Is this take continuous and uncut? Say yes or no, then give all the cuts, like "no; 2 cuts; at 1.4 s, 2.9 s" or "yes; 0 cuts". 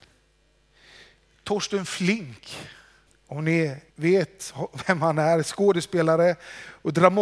no; 2 cuts; at 3.1 s, 3.9 s